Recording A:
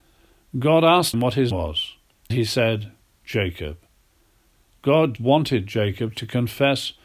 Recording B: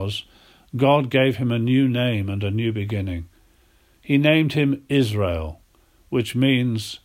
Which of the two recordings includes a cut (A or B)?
A